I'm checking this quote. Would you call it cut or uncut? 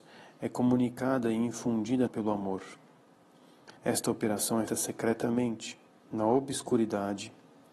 cut